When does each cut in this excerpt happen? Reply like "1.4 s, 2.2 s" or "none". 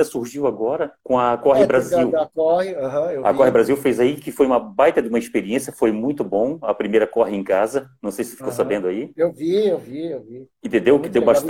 1.0 s